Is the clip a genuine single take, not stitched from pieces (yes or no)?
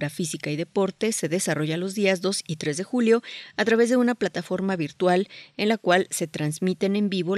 yes